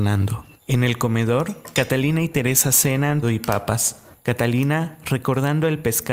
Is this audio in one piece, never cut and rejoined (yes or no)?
no